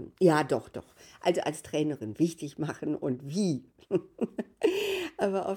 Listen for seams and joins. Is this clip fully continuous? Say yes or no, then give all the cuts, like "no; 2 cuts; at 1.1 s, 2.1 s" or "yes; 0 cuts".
yes; 0 cuts